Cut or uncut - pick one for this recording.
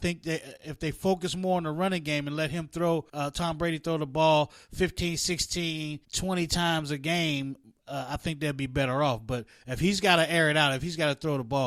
cut